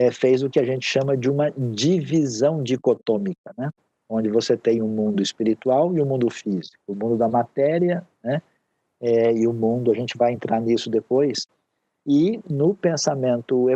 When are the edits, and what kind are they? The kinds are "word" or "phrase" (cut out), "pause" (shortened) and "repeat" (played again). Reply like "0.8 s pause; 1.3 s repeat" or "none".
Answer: none

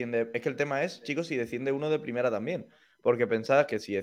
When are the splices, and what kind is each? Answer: none

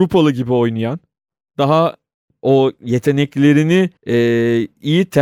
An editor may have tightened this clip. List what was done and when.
4.0 s pause

